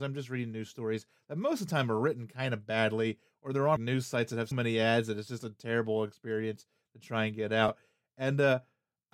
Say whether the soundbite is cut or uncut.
cut